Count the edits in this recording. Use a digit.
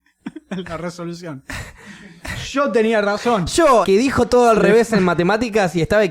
1